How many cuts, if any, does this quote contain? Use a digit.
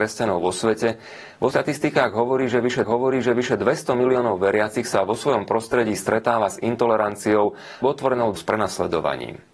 4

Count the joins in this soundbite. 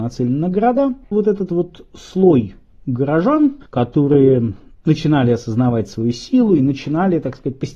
2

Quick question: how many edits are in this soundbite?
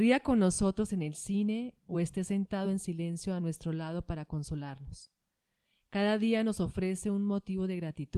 0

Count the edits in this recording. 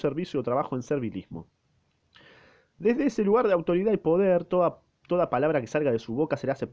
0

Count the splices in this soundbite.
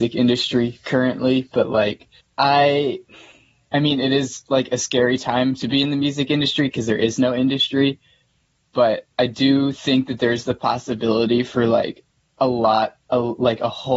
3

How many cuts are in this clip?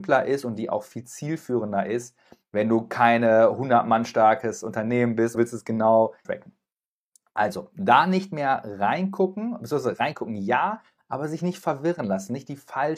2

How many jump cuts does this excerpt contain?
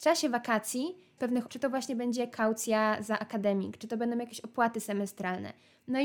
2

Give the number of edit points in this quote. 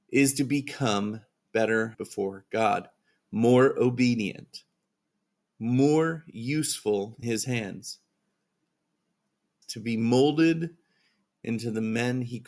4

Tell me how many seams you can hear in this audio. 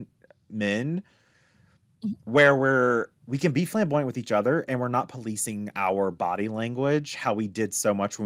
1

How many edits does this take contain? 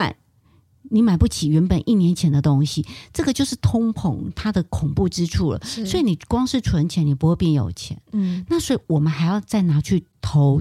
0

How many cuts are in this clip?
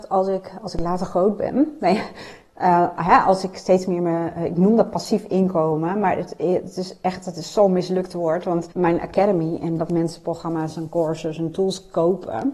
1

